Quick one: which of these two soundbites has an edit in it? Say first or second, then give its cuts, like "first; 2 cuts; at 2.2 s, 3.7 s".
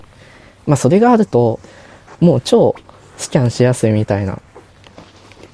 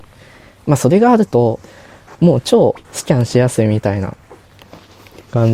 second; 1 cut; at 2.8 s